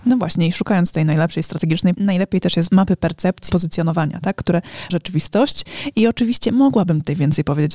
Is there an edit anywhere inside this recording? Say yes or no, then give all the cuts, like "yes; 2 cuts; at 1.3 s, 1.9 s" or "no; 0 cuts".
yes; 4 cuts; at 1.9 s, 2.7 s, 3.5 s, 4.9 s